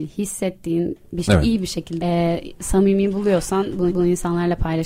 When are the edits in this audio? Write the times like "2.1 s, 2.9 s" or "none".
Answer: 1.2 s, 2.0 s, 3.9 s

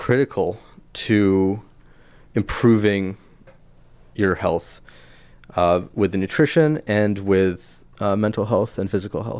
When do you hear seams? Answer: none

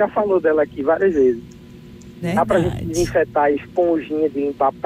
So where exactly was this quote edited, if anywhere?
none

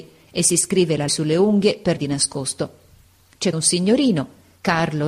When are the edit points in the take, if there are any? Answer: 1.1 s, 2.0 s, 3.5 s

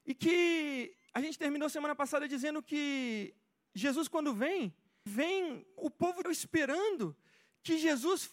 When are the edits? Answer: 5.1 s, 5.8 s, 6.2 s

